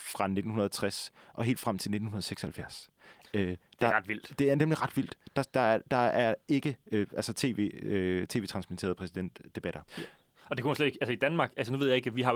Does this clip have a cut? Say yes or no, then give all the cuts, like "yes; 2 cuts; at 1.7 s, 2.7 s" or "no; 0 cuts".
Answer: yes; 1 cut; at 9.9 s